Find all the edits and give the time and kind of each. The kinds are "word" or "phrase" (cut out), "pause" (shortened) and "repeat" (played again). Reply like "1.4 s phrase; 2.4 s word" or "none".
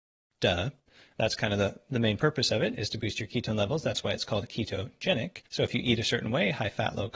5.5 s pause